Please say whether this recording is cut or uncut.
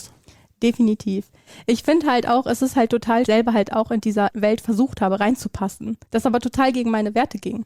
cut